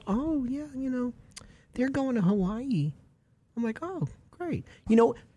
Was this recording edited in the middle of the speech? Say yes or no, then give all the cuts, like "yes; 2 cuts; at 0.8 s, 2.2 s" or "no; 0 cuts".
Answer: no; 0 cuts